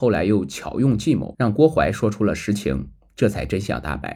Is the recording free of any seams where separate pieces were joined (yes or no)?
yes